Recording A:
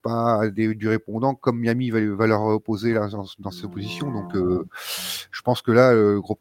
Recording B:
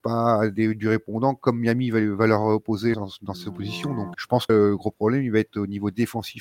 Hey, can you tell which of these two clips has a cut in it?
B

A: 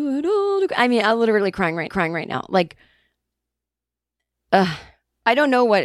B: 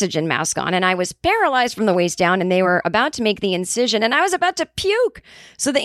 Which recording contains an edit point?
A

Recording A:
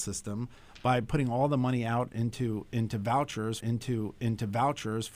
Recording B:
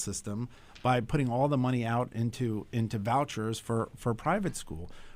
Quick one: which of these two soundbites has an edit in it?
A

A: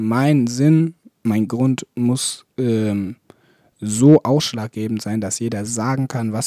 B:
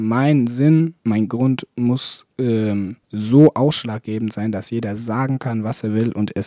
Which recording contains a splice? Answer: B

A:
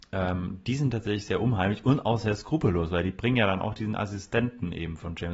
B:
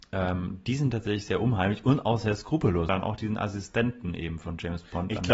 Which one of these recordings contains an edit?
B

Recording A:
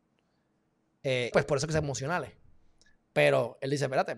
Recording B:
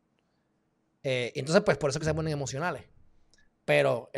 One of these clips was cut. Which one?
A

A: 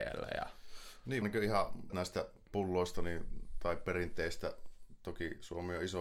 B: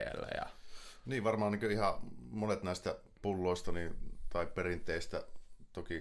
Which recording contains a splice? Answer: A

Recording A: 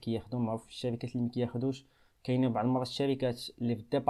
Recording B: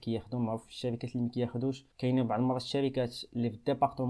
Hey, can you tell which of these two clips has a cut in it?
B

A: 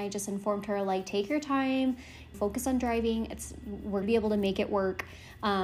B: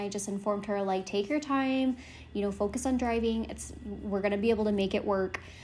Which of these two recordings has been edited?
A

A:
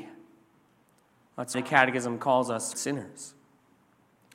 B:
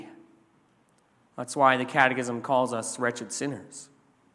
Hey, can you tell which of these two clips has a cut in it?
A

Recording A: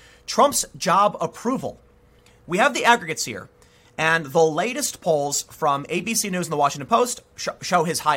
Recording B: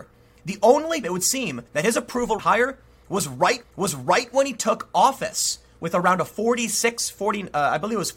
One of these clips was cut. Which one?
B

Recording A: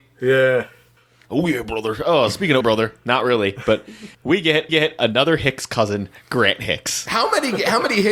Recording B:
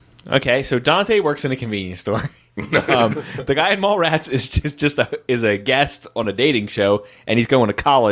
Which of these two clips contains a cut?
A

